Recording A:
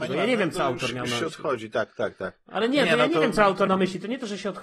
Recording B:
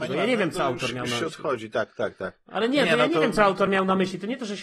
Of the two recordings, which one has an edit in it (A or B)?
A